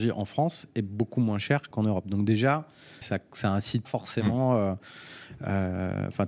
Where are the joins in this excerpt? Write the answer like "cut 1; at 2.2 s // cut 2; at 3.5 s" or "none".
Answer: cut 1; at 1.7 s // cut 2; at 3.0 s // cut 3; at 3.8 s